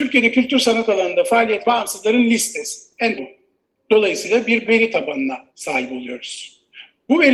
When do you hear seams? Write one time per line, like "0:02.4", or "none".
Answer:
0:01.6
0:03.2
0:04.7
0:05.5